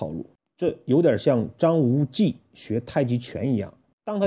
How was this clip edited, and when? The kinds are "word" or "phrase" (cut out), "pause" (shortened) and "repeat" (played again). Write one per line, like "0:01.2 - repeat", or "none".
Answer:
none